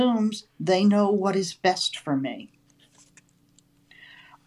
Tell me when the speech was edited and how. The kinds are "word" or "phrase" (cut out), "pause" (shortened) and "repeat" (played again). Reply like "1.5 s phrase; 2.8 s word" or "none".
none

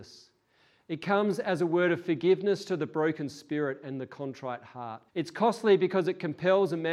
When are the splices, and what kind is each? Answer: 5.1 s pause

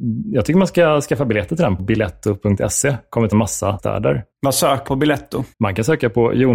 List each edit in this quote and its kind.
1.8 s word; 3.3 s word; 3.8 s word; 4.3 s pause; 4.9 s phrase; 5.5 s pause

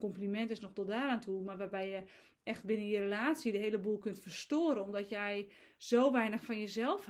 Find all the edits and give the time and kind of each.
none

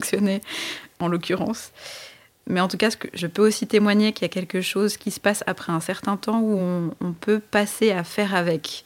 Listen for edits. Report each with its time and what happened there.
none

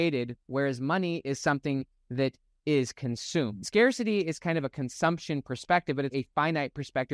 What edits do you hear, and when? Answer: 6.1 s word

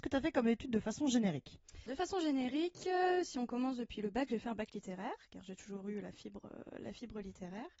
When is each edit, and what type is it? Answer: 1.9 s word

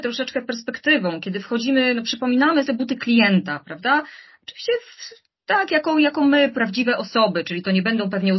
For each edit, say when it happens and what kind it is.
2.7 s phrase

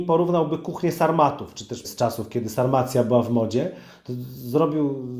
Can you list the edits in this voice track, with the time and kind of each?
1.8 s word

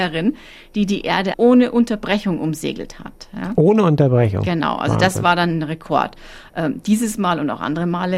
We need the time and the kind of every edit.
1.3 s phrase

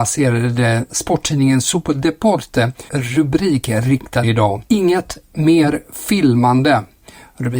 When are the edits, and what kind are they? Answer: 2.9 s word; 4.2 s phrase; 4.7 s pause

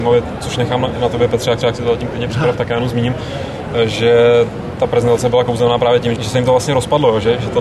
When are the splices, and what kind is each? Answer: 1.6 s repeat; 6.2 s word

